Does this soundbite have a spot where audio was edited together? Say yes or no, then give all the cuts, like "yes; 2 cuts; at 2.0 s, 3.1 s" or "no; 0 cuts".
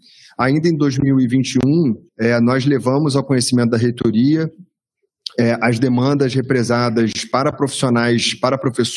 yes; 1 cut; at 2.1 s